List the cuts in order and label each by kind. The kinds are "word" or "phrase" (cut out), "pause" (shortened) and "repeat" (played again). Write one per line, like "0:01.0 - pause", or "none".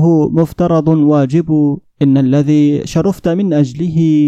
0:01.8 - pause